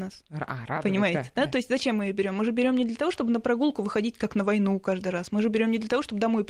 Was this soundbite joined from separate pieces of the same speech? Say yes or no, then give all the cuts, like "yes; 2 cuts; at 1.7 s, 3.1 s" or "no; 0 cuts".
no; 0 cuts